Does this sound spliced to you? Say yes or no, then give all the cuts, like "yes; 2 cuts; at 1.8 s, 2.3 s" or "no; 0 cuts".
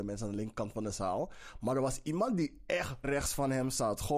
yes; 1 cut; at 3.0 s